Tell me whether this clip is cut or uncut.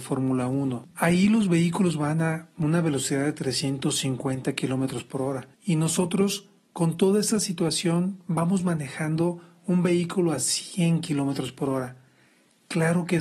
cut